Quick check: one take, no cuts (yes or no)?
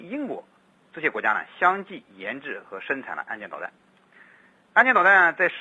yes